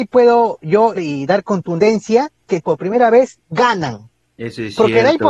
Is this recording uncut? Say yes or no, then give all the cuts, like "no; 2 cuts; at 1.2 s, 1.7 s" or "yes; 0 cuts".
no; 2 cuts; at 1.0 s, 2.6 s